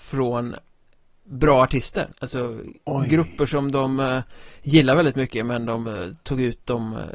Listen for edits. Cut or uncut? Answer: cut